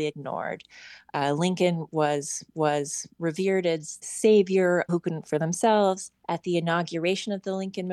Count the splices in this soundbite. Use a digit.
5